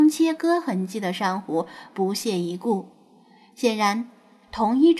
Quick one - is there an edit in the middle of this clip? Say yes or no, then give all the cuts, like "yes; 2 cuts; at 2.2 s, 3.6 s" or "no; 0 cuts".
no; 0 cuts